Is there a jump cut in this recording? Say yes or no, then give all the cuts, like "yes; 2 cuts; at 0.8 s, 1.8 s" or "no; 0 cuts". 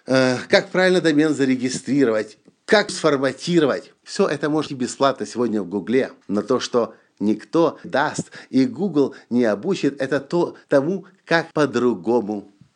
yes; 7 cuts; at 2.9 s, 4.0 s, 4.7 s, 6.2 s, 7.8 s, 10.6 s, 11.5 s